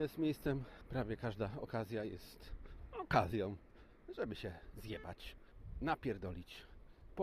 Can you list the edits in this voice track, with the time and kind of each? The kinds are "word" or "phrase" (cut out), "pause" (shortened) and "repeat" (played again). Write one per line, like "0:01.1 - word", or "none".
none